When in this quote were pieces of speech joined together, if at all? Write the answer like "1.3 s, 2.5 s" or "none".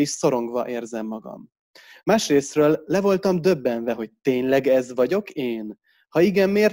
none